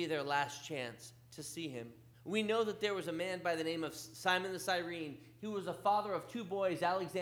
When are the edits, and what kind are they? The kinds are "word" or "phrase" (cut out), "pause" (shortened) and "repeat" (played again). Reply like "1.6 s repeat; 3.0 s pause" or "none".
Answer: 2.1 s pause